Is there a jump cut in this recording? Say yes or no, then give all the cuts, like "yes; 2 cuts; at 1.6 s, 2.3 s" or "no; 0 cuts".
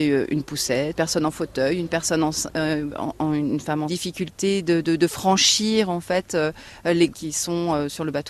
yes; 4 cuts; at 1.0 s, 3.9 s, 4.8 s, 7.1 s